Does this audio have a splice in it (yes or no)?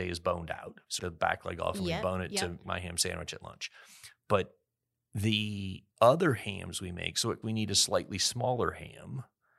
yes